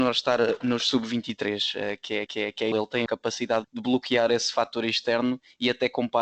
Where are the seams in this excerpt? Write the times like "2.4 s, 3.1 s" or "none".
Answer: 2.3 s, 2.7 s, 3.1 s, 3.6 s